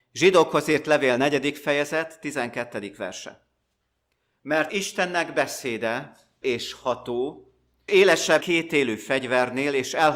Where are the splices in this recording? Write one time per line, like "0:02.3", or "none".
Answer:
0:04.7
0:06.4
0:07.9
0:08.4